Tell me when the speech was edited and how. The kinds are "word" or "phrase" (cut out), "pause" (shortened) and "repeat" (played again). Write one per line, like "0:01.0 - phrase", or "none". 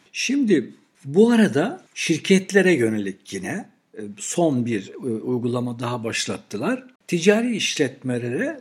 0:01.9 - pause
0:07.0 - pause